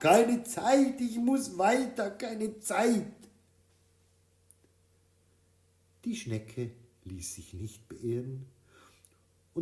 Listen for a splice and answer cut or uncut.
uncut